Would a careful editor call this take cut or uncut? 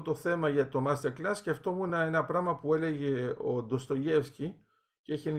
uncut